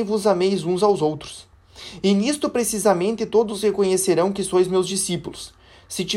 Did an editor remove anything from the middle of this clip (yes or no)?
no